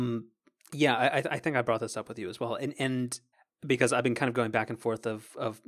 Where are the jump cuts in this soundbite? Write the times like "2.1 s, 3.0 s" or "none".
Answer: 3.3 s